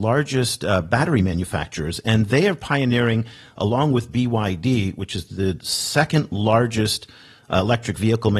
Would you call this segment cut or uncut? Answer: uncut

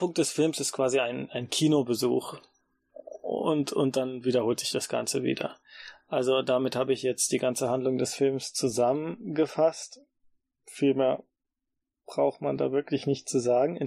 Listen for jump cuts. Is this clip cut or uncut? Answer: uncut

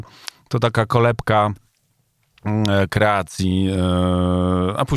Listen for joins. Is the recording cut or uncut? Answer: uncut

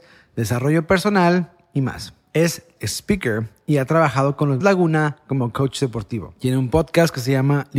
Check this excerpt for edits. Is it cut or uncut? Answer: cut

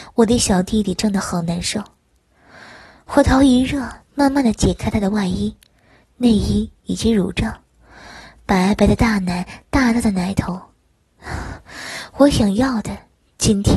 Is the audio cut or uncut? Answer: uncut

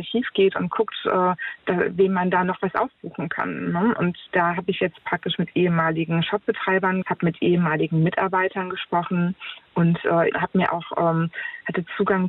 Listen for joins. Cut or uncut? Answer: cut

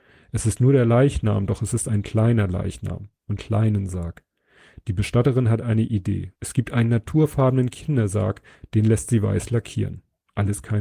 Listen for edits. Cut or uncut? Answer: cut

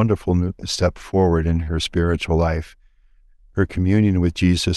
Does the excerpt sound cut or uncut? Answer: uncut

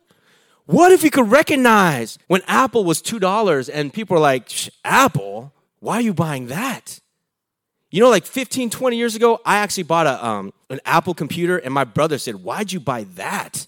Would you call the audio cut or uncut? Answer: cut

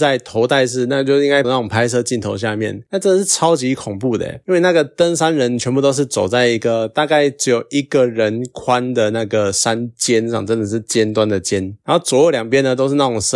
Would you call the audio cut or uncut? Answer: cut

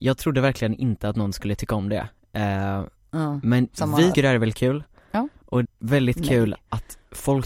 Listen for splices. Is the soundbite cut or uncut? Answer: cut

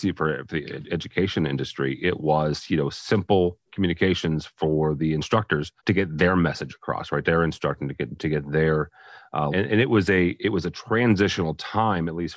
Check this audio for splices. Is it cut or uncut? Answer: cut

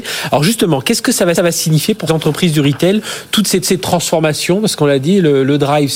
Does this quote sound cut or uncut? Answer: cut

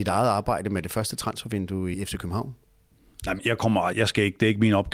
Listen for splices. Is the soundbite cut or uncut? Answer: cut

